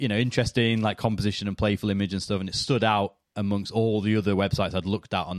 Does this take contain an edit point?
yes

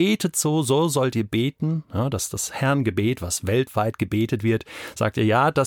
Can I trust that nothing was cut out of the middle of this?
yes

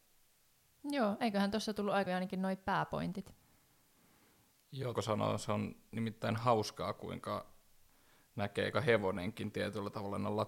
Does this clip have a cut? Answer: yes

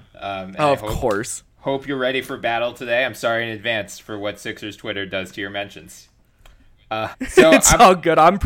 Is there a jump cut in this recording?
yes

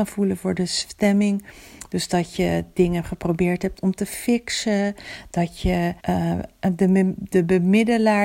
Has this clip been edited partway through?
yes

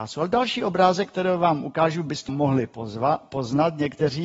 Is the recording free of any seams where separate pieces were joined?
no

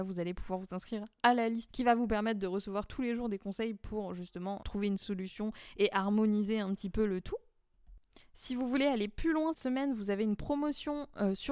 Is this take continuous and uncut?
no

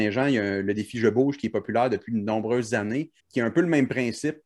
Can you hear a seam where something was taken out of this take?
yes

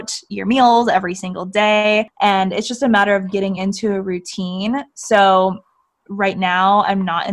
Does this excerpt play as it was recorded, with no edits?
yes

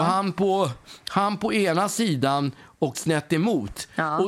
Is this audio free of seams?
no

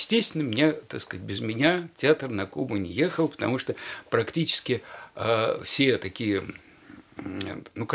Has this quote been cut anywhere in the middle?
no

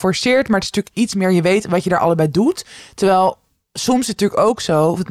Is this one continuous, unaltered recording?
yes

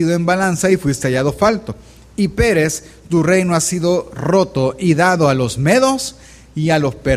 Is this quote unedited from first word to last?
yes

